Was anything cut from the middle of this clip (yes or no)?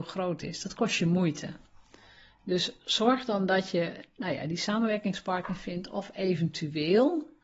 no